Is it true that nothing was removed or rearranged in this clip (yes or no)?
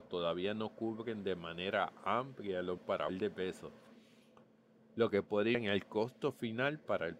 no